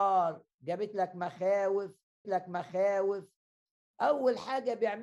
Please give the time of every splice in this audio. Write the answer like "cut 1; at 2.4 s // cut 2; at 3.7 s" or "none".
cut 1; at 2.2 s